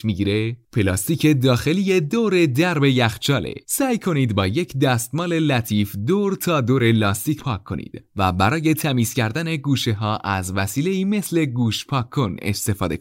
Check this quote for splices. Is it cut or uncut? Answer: cut